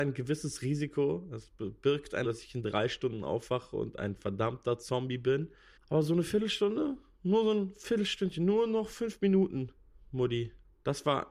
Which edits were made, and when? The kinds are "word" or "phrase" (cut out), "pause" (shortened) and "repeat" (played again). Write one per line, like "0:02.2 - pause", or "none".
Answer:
0:02.2 - word